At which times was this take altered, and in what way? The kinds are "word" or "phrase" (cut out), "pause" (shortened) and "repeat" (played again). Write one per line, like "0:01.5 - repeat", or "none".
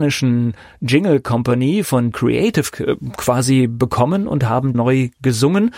0:02.1 - word
0:04.7 - word